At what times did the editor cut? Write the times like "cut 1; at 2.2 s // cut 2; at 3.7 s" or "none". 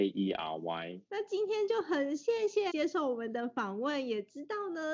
cut 1; at 1.1 s // cut 2; at 2.7 s